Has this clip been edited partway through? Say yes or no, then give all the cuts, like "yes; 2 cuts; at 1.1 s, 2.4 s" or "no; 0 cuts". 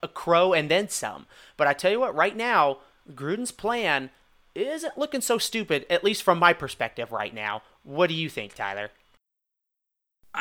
no; 0 cuts